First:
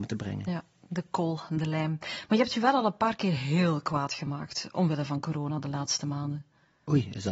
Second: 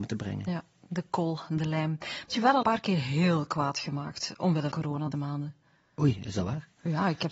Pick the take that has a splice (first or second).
second